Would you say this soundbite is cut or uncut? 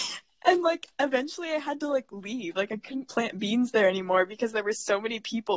uncut